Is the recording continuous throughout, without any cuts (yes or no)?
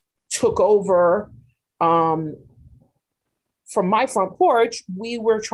yes